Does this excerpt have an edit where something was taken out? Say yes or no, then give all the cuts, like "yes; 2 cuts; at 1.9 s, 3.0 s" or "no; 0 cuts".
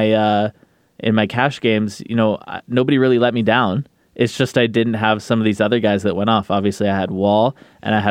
no; 0 cuts